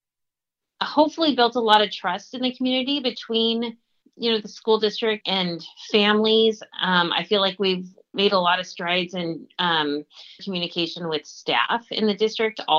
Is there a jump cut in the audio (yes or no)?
yes